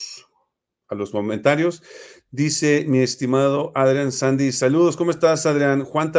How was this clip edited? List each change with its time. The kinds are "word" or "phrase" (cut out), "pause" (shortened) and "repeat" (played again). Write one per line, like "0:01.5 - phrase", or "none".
none